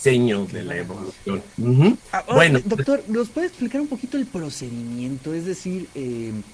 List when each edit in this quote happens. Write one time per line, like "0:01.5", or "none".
0:01.5

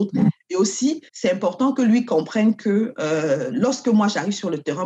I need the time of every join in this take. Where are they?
0:01.1

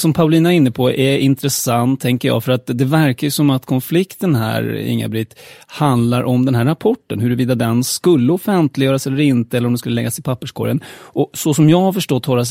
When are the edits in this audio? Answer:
none

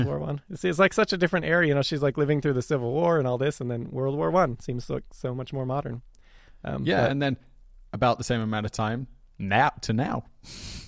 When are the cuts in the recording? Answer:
none

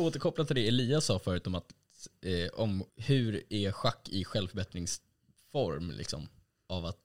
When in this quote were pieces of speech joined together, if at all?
0:02.9

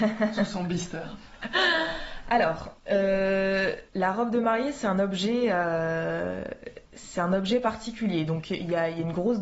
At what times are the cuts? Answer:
0:03.9
0:06.9

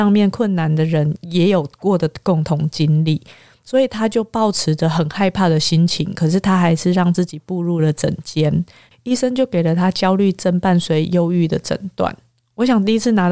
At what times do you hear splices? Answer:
none

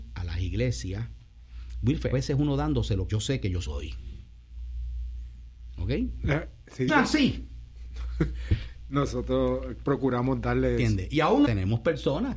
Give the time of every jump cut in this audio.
0:02.1
0:03.1
0:03.7
0:06.9
0:11.4

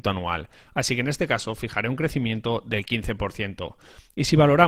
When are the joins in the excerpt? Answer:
none

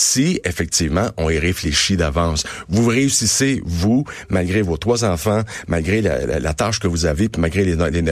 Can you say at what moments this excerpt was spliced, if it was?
none

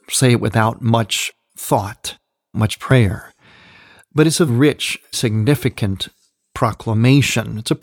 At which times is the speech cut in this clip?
0:02.5
0:04.5
0:05.1

